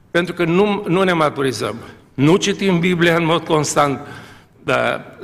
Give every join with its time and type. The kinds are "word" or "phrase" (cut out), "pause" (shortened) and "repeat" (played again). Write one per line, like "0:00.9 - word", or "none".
none